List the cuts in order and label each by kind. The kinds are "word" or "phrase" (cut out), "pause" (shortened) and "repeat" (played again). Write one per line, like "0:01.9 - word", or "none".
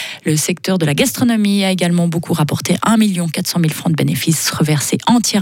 none

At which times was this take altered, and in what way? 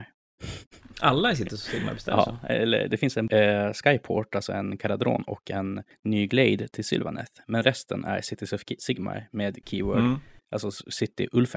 none

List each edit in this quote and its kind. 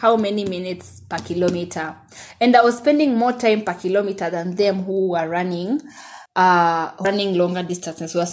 0:06.3 - pause
0:07.0 - word

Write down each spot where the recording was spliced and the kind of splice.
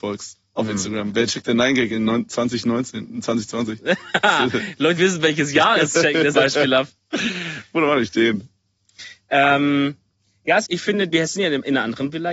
0:05.0 - word
0:06.3 - word
0:10.7 - word
0:11.1 - word

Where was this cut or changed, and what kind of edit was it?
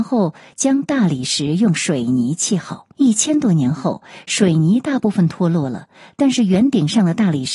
0:02.9 - pause

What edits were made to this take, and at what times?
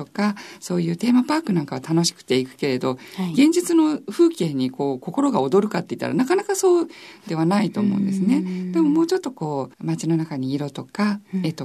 0:09.7 - pause

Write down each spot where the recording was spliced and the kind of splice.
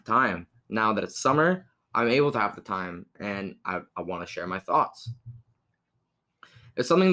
0:03.9 - pause

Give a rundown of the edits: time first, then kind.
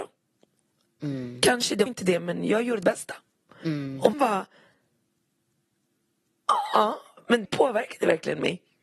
0:01.9 - word
0:02.8 - word
0:04.1 - word
0:07.4 - word

